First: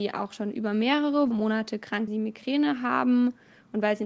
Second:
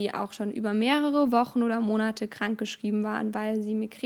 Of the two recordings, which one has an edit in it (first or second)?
first